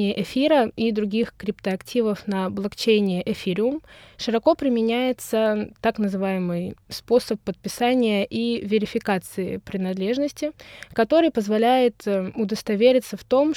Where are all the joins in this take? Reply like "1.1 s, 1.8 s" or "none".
none